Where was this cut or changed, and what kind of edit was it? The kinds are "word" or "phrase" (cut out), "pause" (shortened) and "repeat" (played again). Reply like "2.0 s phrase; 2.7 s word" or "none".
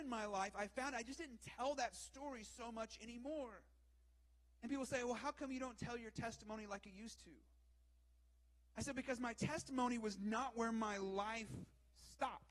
none